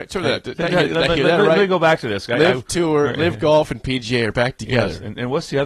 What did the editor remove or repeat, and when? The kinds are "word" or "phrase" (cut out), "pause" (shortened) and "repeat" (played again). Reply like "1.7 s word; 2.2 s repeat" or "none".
none